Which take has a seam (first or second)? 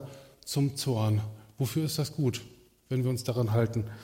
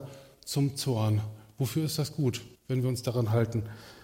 second